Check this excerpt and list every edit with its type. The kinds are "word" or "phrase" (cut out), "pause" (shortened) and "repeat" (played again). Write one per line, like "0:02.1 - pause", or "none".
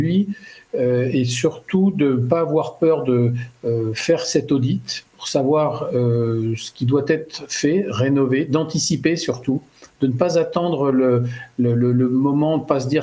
none